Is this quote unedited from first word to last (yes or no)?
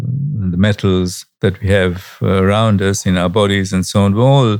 yes